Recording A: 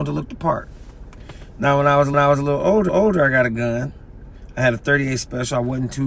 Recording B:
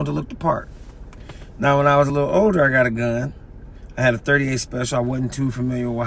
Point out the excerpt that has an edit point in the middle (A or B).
A